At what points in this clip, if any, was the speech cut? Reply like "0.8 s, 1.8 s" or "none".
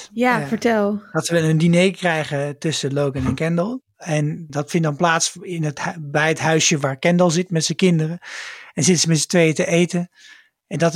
4.5 s